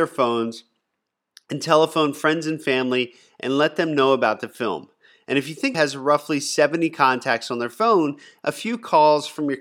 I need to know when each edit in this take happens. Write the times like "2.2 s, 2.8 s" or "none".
5.7 s